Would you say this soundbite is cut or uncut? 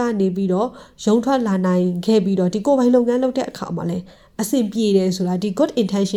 uncut